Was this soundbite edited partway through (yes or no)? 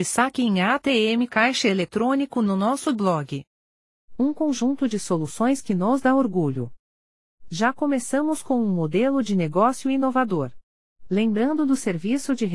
no